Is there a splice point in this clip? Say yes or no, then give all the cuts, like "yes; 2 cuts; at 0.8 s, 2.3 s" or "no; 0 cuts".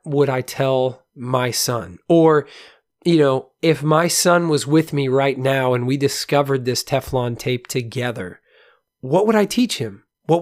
no; 0 cuts